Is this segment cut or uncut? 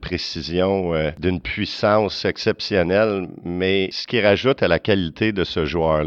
uncut